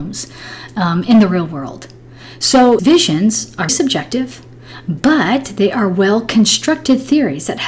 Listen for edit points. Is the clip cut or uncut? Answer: cut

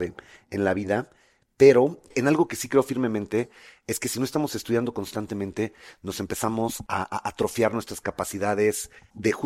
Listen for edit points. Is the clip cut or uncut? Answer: uncut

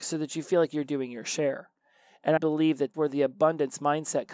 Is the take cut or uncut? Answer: cut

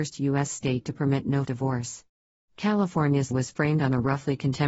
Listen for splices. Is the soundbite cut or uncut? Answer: cut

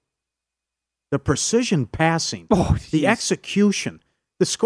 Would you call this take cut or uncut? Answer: uncut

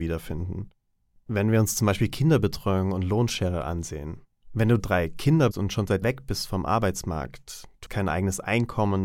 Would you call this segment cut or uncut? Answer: cut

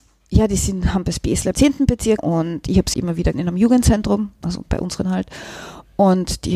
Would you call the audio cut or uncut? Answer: cut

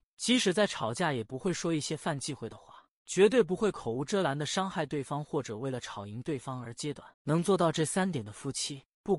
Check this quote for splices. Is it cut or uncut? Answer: cut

